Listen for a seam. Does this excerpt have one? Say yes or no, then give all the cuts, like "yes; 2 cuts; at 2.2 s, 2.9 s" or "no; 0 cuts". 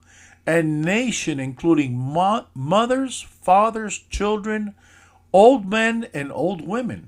no; 0 cuts